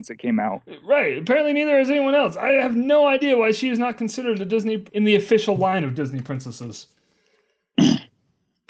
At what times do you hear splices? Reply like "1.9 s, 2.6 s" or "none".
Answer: 4.9 s